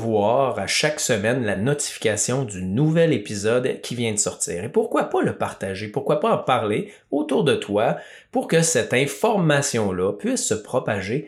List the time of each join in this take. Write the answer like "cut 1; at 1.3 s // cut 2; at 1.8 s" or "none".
none